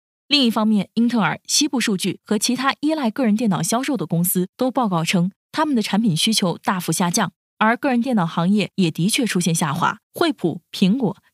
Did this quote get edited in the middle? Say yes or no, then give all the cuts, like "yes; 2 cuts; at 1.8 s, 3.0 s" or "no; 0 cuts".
yes; 1 cut; at 10.0 s